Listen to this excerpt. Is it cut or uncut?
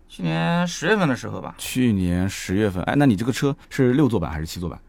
cut